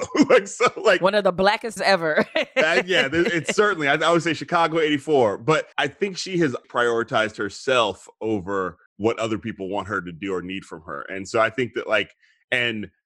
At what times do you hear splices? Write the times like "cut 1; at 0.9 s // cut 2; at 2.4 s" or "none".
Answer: cut 1; at 1.8 s // cut 2; at 5.7 s // cut 3; at 6.6 s // cut 4; at 8.9 s